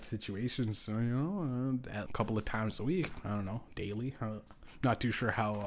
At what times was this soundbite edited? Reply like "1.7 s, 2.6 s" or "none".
2.1 s